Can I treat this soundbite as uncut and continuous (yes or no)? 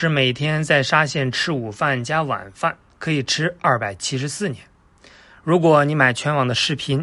yes